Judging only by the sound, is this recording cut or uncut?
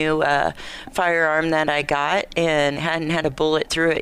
cut